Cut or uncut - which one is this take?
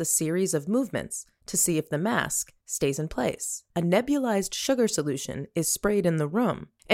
cut